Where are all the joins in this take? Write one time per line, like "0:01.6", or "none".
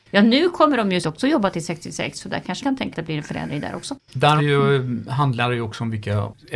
0:01.0
0:02.6
0:02.9
0:04.4